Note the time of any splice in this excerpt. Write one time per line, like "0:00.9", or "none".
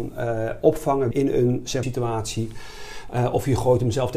0:01.1
0:01.8